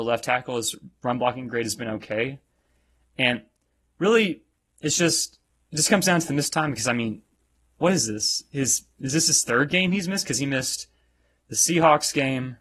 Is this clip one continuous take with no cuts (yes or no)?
yes